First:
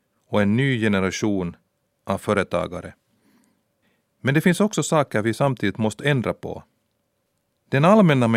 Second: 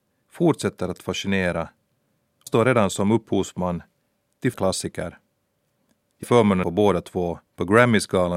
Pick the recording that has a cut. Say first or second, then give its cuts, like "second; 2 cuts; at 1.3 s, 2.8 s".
second; 5 cuts; at 2.5 s, 4.5 s, 6.2 s, 6.6 s, 7.5 s